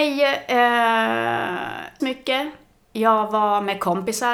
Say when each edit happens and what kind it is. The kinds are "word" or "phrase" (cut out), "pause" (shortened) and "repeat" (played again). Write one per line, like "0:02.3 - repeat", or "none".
0:02.0 - word